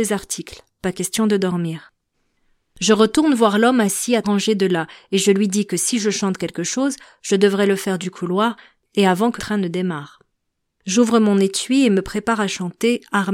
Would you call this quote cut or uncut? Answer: cut